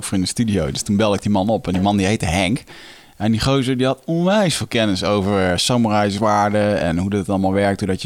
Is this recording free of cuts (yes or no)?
yes